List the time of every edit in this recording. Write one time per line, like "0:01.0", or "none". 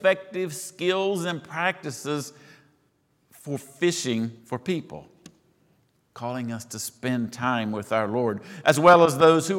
0:04.4